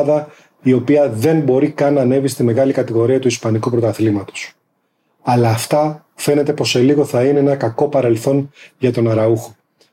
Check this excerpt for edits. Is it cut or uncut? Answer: uncut